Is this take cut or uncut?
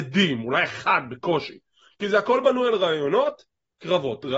uncut